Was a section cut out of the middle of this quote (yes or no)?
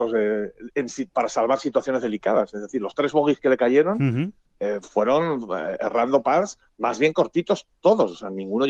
no